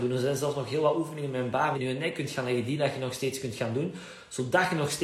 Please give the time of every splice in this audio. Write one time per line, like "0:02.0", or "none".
0:01.7